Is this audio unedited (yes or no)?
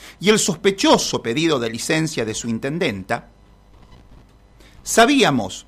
yes